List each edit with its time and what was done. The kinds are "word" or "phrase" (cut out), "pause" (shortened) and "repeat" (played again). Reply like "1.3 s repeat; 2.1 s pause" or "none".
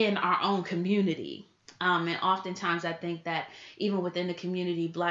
none